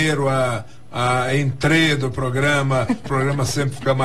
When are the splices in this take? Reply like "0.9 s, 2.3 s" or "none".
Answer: 3.0 s

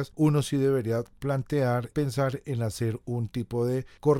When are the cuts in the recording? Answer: 1.9 s

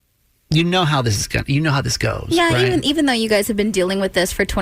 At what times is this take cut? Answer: none

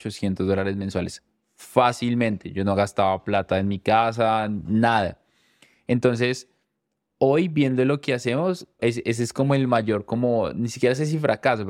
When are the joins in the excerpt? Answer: 8.8 s

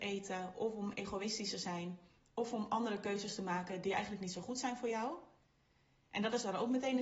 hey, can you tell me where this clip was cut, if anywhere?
none

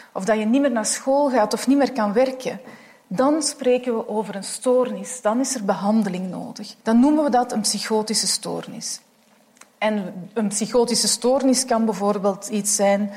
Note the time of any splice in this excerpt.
6.8 s

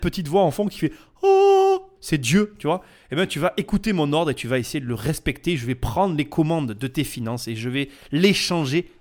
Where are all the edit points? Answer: none

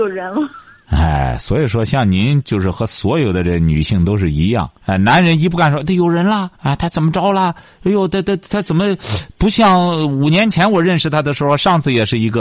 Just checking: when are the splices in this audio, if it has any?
4.8 s, 6.6 s

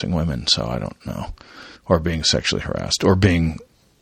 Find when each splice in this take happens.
1.8 s

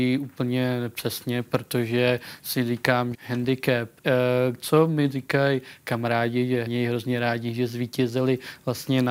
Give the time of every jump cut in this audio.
3.1 s, 4.0 s, 6.7 s

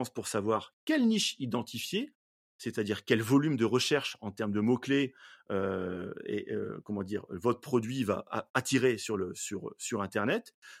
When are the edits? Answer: none

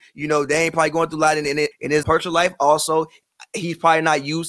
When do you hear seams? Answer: 1.7 s, 2.0 s

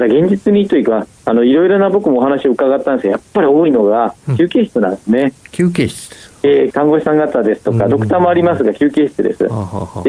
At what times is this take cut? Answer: none

